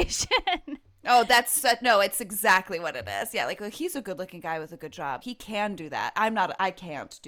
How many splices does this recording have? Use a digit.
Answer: 1